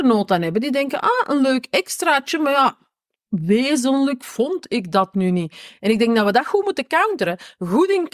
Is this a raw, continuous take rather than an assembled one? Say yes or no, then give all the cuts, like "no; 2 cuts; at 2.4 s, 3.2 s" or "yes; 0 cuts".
yes; 0 cuts